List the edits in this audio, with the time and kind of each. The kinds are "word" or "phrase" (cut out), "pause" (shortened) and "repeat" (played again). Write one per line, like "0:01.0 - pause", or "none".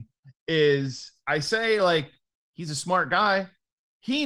none